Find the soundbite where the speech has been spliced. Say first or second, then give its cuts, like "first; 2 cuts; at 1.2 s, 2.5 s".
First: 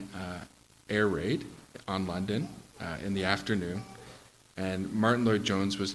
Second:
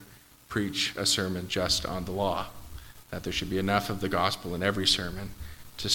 first; 1 cut; at 2.7 s